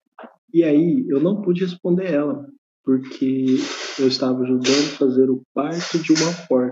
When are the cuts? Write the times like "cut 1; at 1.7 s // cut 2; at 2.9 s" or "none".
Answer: cut 1; at 2.6 s